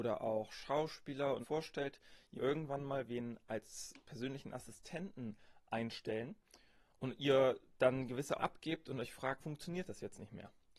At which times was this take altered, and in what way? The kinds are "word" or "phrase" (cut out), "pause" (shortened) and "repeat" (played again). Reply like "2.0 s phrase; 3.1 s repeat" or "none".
1.4 s word; 2.4 s word; 8.4 s word; 9.4 s word